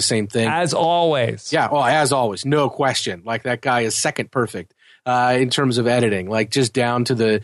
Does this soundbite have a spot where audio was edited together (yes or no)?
no